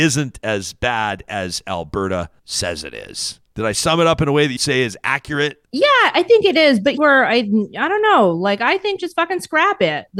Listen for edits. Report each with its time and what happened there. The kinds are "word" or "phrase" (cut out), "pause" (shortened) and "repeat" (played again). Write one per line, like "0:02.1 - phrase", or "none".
0:02.4 - pause
0:03.5 - pause
0:04.6 - word
0:05.6 - pause
0:07.0 - word
0:09.0 - phrase